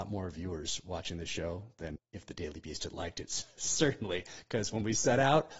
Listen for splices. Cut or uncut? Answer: cut